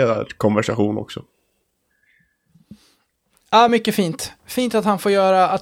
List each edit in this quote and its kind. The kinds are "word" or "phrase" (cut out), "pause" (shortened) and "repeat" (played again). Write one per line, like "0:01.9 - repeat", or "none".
none